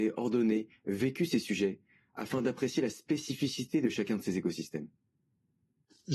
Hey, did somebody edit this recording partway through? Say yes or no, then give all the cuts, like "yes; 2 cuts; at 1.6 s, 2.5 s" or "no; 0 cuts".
no; 0 cuts